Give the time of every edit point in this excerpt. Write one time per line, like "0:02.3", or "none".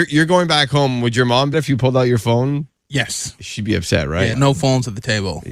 0:01.5
0:04.3